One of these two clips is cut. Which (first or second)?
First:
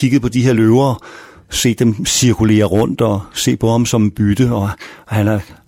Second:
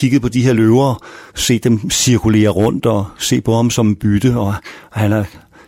second